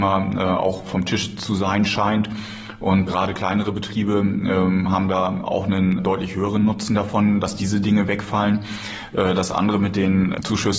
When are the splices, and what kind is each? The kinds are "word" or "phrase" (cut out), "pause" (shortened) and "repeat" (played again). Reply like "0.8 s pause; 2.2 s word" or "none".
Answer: 3.1 s word; 6.0 s word